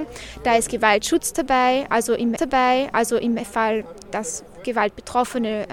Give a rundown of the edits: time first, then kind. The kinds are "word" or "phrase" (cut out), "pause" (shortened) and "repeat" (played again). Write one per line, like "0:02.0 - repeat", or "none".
0:02.4 - repeat